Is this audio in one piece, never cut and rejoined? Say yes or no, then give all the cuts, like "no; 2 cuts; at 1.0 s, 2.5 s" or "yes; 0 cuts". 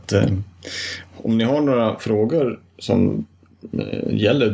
yes; 0 cuts